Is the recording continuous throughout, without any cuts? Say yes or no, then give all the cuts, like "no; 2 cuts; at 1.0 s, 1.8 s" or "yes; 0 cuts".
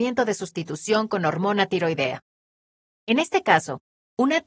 yes; 0 cuts